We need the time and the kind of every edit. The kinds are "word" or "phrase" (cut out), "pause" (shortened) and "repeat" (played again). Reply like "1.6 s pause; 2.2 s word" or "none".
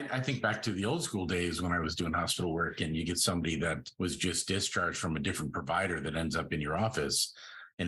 none